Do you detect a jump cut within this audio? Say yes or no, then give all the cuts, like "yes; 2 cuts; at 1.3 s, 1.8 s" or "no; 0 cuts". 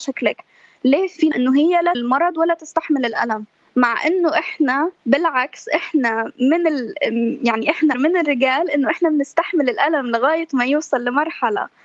yes; 5 cuts; at 1.3 s, 1.9 s, 3.6 s, 5.0 s, 7.9 s